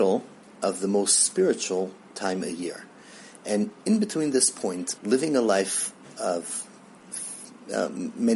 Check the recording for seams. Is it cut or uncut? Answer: cut